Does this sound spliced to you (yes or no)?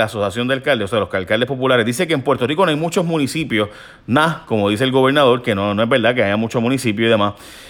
no